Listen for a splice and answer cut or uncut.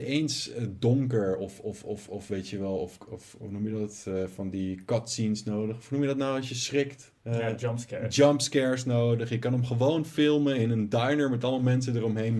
cut